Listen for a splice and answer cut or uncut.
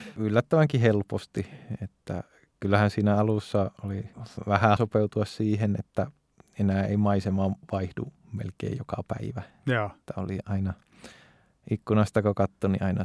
cut